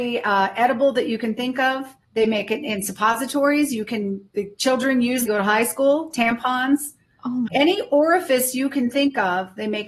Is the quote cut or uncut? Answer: cut